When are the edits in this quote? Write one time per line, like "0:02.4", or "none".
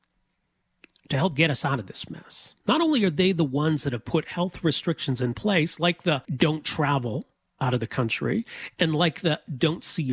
0:06.2